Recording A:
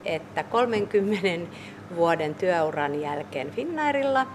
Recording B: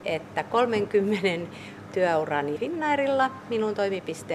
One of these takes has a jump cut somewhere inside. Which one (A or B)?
B